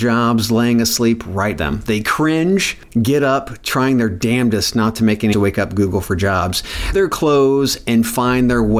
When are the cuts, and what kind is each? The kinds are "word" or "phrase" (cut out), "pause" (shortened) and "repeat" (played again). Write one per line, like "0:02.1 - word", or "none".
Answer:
0:01.6 - word
0:05.3 - word
0:06.9 - word

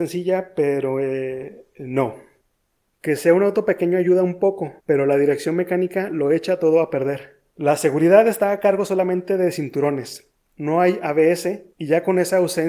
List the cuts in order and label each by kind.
0:02.4 - pause
0:04.8 - pause
0:07.5 - pause
0:11.7 - pause

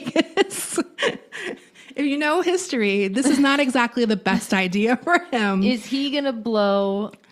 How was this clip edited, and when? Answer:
0:02.4 - word

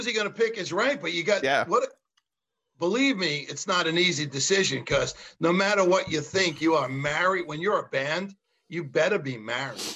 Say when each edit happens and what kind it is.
none

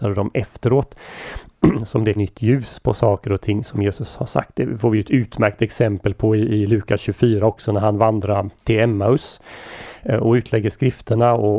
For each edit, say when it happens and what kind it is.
0:02.2 - word
0:08.6 - pause

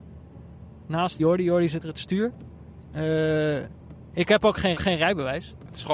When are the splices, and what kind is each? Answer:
0:01.2 - word
0:01.8 - word
0:04.8 - repeat

